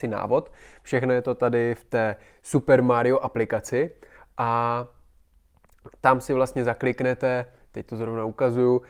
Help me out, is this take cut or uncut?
uncut